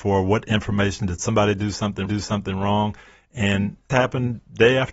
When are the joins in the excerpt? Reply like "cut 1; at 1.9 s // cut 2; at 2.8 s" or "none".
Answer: cut 1; at 2.1 s // cut 2; at 3.9 s

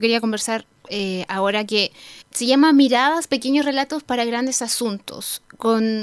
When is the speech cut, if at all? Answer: cut 1; at 2.2 s

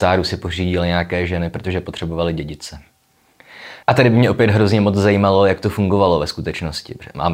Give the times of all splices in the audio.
cut 1; at 3.8 s

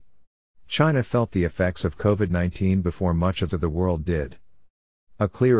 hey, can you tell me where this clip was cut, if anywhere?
cut 1; at 3.5 s

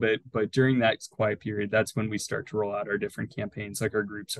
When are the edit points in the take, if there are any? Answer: none

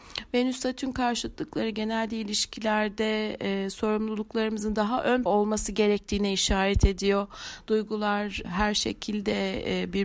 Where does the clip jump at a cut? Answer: cut 1; at 5.3 s // cut 2; at 8.4 s

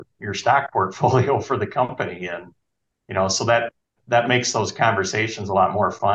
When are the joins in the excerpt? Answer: none

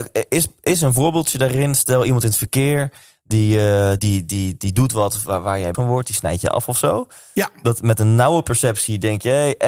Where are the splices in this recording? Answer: cut 1; at 4.0 s // cut 2; at 5.7 s

